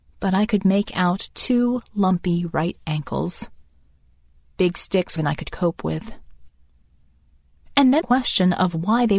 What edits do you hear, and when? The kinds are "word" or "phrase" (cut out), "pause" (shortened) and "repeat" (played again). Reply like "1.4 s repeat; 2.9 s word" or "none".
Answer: 5.2 s phrase; 8.0 s phrase